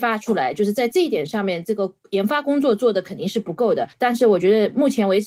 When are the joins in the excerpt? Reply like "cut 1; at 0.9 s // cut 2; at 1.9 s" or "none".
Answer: cut 1; at 3.9 s